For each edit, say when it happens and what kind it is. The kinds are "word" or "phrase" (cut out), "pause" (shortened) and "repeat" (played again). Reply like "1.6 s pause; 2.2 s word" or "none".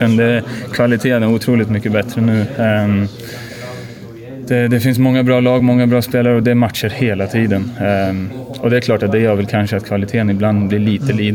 none

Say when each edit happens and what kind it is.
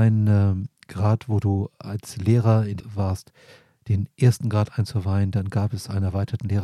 2.8 s word

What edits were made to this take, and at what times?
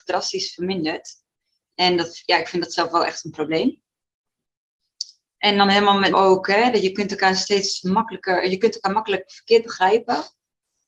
6.1 s word

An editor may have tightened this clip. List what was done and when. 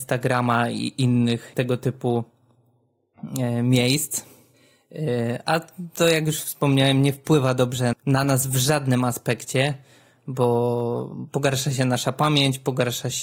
7.9 s word

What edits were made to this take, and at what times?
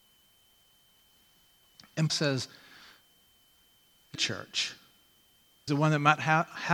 2.1 s word; 4.1 s word; 5.7 s word

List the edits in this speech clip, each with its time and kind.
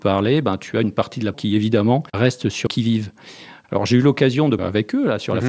1.3 s word; 2.1 s pause; 2.7 s word; 4.6 s phrase

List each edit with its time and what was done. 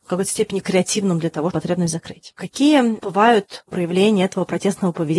1.5 s phrase; 3.7 s word

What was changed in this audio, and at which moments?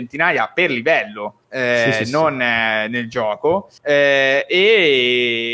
1.4 s pause; 3.8 s pause

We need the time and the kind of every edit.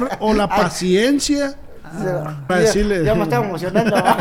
2.5 s word

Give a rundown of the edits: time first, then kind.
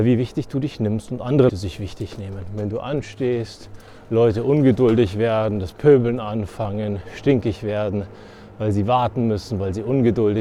1.5 s word

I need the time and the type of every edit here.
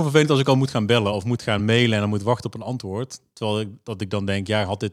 none

